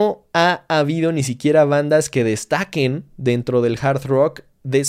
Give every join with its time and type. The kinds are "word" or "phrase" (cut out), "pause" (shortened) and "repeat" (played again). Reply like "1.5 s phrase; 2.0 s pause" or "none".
none